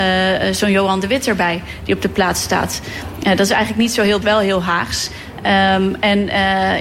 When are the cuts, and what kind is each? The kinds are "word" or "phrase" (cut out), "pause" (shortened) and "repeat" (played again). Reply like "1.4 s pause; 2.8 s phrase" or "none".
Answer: 4.2 s word